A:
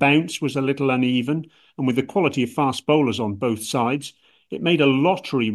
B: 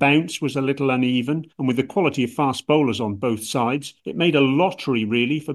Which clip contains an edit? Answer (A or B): B